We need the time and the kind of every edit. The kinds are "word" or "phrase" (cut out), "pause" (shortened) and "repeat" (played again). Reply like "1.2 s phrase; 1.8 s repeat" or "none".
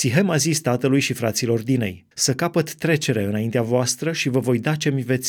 2.1 s pause